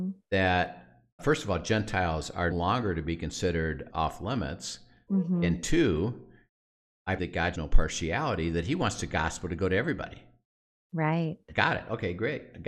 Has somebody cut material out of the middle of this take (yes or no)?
yes